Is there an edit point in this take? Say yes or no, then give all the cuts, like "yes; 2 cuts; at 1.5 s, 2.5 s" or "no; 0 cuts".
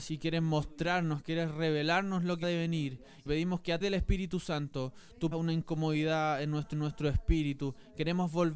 yes; 5 cuts; at 2.4 s, 3.3 s, 3.8 s, 5.3 s, 6.7 s